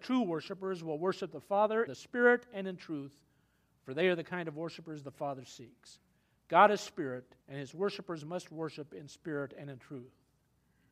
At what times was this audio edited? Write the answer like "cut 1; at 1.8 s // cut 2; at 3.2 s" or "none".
cut 1; at 1.9 s // cut 2; at 7.4 s